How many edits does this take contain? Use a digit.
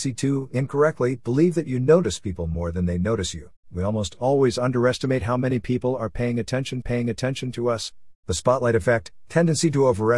3